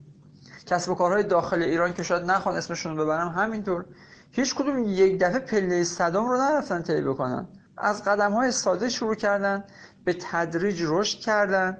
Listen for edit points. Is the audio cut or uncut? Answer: cut